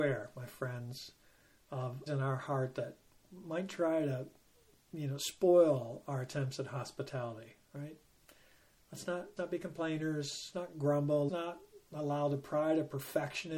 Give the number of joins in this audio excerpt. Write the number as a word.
four